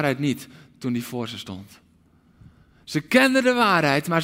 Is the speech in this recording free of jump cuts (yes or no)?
yes